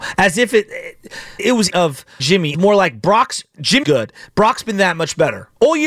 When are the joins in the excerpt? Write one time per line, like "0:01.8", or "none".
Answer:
0:01.4
0:01.7
0:02.2
0:02.5
0:03.8